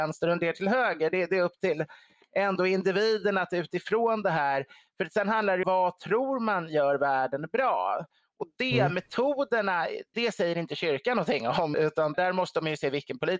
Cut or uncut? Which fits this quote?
cut